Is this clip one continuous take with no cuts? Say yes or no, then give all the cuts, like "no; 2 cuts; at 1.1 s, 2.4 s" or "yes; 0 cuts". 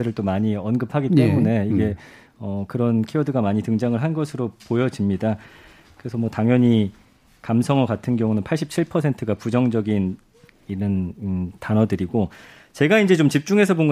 yes; 0 cuts